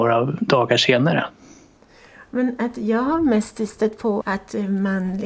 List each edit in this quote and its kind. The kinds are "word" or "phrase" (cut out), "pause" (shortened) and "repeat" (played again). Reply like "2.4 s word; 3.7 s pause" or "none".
4.2 s word